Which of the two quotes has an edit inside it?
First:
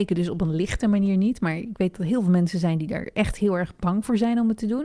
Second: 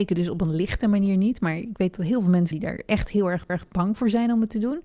second; 2 cuts; at 2.5 s, 3.5 s

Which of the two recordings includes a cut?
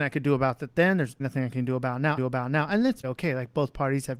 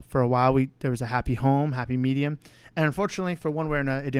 first; 3 cuts; at 1.2 s, 2.2 s, 3.0 s

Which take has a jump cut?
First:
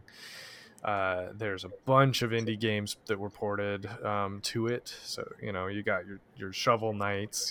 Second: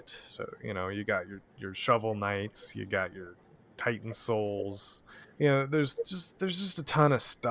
second; 1 cut; at 5.2 s

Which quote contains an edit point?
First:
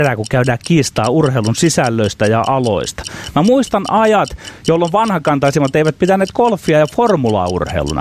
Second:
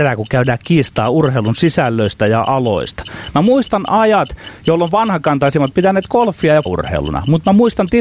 second; 2 cuts; at 5.7 s, 6.7 s

